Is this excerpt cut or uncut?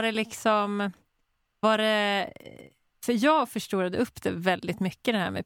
uncut